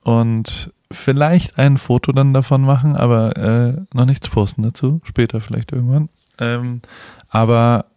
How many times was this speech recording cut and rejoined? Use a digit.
0